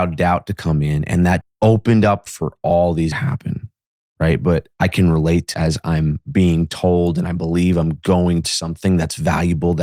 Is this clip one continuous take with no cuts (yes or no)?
no